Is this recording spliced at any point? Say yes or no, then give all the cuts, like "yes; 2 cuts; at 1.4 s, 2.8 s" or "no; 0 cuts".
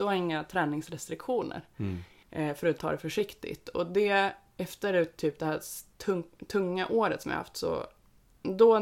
yes; 1 cut; at 2.8 s